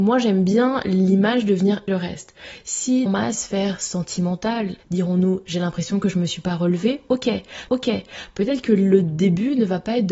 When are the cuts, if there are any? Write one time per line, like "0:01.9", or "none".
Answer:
0:01.9
0:03.1
0:04.8
0:07.7